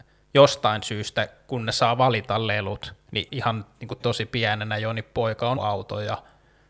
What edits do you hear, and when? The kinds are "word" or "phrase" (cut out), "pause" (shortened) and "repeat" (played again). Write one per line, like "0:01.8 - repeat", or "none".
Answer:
0:03.3 - word
0:04.0 - word
0:05.6 - word